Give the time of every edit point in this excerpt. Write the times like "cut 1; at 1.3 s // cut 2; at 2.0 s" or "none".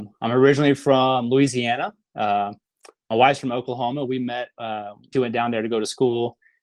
cut 1; at 5.1 s